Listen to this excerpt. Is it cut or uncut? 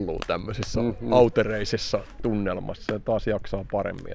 uncut